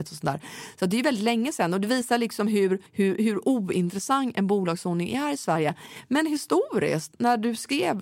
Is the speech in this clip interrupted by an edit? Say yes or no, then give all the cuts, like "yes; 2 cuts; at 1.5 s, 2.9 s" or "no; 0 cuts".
yes; 1 cut; at 2.9 s